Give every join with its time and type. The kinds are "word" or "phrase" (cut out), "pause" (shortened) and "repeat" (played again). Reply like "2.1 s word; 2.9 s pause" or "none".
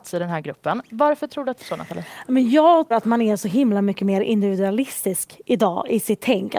1.6 s phrase; 2.9 s word